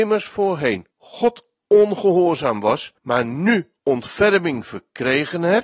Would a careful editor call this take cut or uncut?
cut